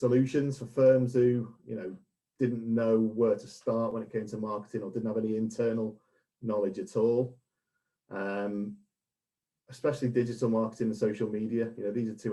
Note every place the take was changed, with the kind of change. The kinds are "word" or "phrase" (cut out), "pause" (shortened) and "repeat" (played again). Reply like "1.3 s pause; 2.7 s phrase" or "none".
none